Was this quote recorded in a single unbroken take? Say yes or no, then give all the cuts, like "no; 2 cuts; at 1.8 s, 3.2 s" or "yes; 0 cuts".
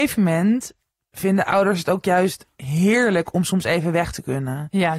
yes; 0 cuts